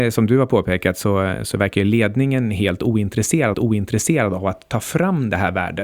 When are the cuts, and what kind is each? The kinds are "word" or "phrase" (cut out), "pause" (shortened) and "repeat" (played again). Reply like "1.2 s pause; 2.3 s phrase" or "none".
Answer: 3.5 s repeat